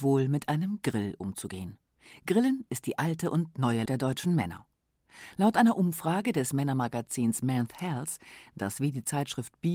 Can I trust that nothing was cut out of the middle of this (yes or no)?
no